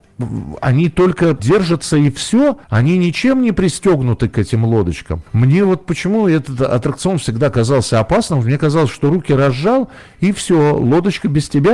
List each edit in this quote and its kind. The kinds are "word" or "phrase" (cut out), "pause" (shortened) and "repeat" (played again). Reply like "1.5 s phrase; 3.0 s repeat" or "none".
1.4 s word; 2.6 s pause; 5.3 s pause